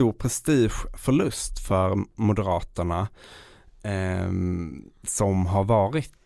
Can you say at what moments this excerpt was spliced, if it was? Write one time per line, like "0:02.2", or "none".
none